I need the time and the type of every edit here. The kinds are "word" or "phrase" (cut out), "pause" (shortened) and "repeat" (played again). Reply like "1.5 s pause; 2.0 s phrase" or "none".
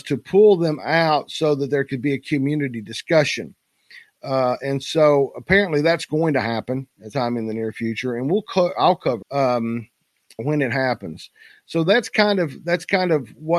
7.1 s word; 9.2 s word; 10.4 s word